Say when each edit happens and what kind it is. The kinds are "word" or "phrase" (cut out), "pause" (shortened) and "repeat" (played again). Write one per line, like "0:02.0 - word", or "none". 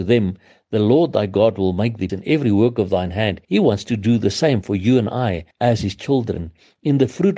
0:02.1 - word
0:03.4 - pause
0:05.5 - pause